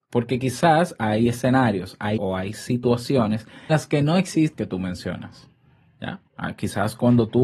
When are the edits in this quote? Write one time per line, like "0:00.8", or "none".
0:02.2
0:03.7
0:04.5
0:06.3